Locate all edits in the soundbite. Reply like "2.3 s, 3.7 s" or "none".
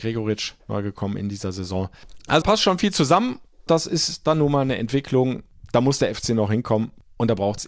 2.4 s, 3.7 s